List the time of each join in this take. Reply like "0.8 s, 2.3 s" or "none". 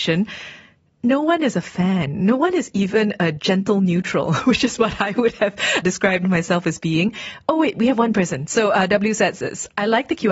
5.8 s

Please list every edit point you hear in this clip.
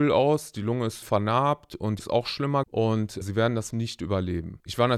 1.0 s, 2.0 s, 2.6 s, 3.2 s, 3.7 s

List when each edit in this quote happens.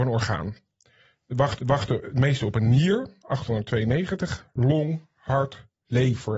1.6 s

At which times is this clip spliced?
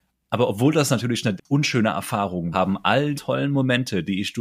1.4 s, 2.5 s, 3.1 s

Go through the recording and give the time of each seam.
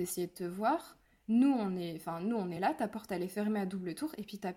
none

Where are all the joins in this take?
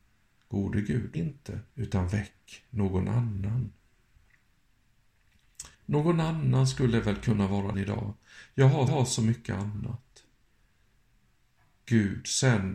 1.1 s, 1.7 s, 5.7 s, 7.7 s, 8.9 s

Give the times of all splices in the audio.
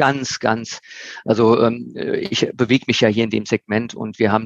none

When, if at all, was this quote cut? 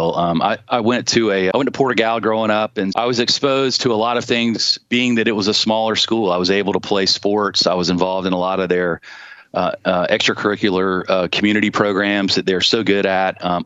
1.5 s, 2.9 s

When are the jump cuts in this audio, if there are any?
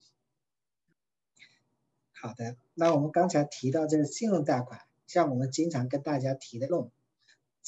6.7 s

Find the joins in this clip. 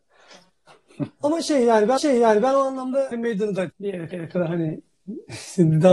2.0 s, 3.1 s, 3.7 s, 4.1 s

